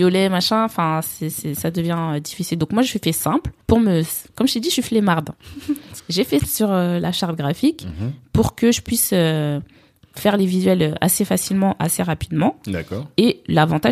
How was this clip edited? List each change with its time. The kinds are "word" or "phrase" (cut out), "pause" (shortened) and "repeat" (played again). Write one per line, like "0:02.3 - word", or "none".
0:03.6 - pause
0:06.0 - word
0:06.4 - word